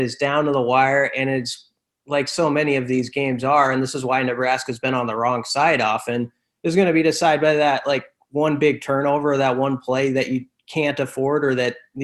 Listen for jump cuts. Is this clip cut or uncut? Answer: uncut